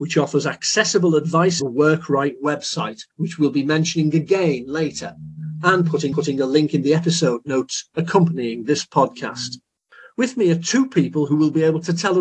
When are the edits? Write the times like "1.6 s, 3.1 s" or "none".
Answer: 1.6 s, 3.1 s, 6.1 s